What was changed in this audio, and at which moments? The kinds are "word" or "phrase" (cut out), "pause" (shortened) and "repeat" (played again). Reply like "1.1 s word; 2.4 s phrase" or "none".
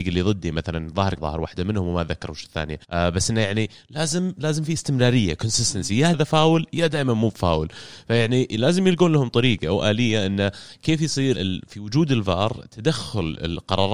1.2 s phrase; 2.8 s pause; 6.1 s word; 11.3 s word